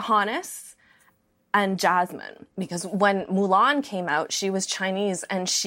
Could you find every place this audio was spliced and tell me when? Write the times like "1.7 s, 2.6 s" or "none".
2.5 s